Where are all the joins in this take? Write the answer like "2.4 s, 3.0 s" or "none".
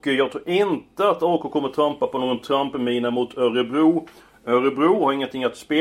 none